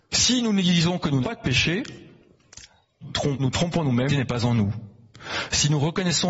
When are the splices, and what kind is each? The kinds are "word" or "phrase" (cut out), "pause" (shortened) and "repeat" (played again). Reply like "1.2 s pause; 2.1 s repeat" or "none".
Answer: 1.2 s word; 3.0 s word; 3.4 s word; 4.1 s phrase